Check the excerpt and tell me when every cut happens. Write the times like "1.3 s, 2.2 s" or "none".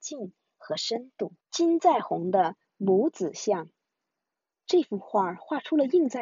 1.4 s